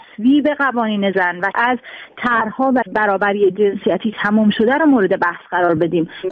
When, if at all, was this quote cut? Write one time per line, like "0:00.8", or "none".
0:01.1
0:01.5
0:02.8